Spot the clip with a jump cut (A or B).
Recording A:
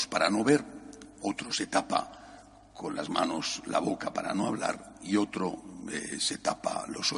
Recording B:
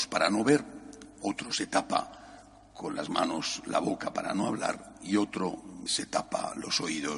B